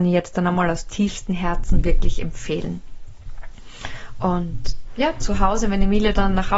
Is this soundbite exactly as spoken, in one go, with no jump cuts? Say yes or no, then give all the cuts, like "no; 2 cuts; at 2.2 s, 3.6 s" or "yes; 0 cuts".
yes; 0 cuts